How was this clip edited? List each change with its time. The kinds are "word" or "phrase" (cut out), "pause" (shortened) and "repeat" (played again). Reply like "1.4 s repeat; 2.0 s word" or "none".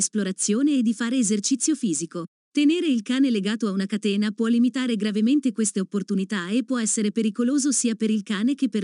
2.3 s pause